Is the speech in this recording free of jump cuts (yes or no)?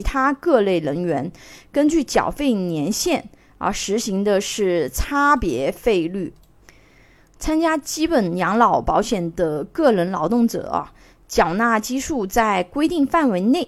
yes